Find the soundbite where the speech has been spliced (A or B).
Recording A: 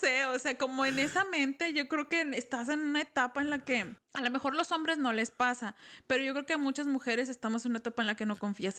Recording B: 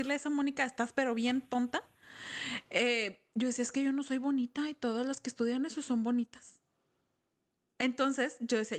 A